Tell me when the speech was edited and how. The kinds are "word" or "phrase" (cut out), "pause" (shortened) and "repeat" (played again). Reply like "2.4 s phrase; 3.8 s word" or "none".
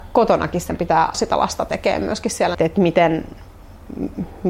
1.1 s word; 2.5 s phrase